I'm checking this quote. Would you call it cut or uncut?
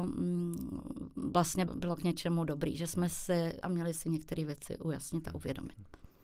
cut